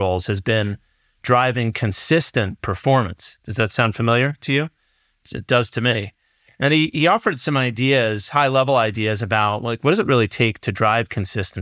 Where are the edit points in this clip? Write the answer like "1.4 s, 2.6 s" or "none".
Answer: none